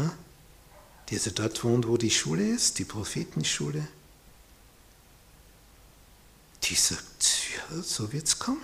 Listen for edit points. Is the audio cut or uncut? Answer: uncut